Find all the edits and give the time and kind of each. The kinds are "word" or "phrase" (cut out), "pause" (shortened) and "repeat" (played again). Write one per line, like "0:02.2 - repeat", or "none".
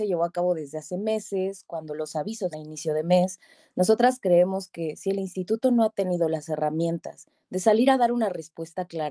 0:02.5 - phrase